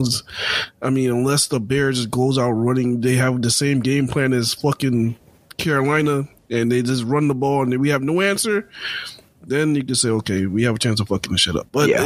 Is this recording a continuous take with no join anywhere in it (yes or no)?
yes